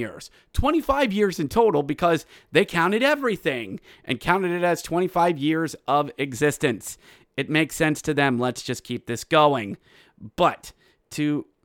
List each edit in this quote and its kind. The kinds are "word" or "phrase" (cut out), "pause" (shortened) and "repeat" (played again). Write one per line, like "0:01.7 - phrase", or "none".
none